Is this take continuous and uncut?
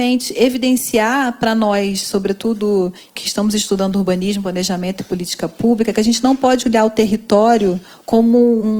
yes; 0 cuts

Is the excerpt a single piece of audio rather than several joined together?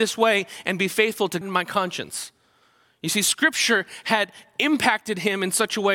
no; 1 cut; at 1.4 s

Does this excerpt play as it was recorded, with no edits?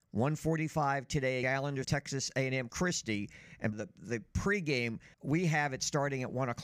no; 5 cuts; at 1.4 s, 1.8 s, 2.7 s, 3.7 s, 5.1 s

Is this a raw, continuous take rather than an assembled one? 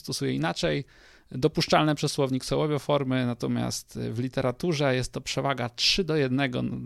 yes; 0 cuts

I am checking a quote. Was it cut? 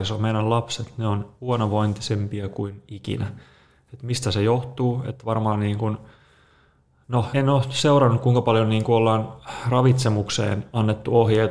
yes; 1 cut; at 7.3 s

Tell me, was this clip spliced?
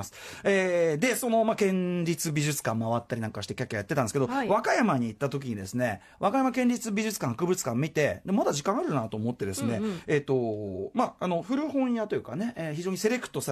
no; 0 cuts

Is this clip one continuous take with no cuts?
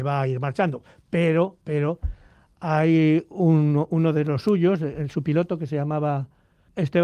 yes; 0 cuts

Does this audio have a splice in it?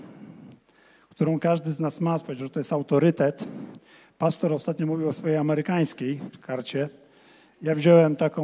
no; 0 cuts

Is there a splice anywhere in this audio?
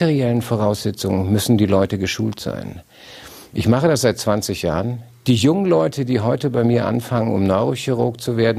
no; 0 cuts

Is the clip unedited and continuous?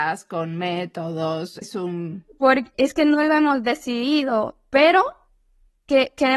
no; 2 cuts; at 1.6 s, 2.7 s

